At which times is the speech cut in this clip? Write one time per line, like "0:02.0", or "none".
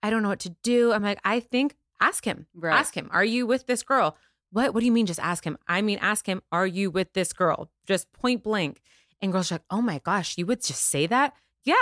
none

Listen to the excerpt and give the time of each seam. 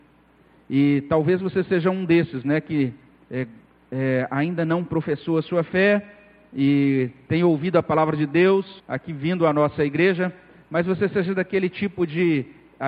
0:08.8

